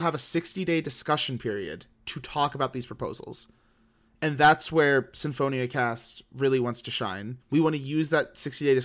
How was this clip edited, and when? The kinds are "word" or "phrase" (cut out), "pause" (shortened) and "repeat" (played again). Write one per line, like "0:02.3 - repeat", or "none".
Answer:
0:07.4 - pause